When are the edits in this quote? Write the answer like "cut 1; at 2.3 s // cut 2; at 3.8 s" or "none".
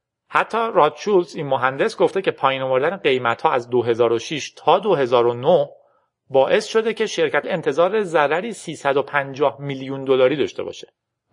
cut 1; at 7.4 s